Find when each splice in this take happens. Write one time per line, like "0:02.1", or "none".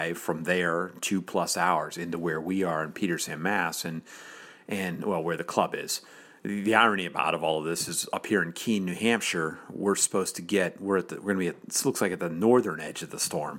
none